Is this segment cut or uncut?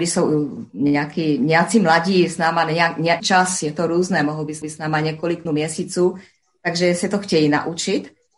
cut